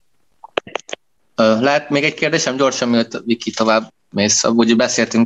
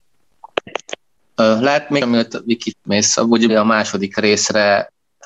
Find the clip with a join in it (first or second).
second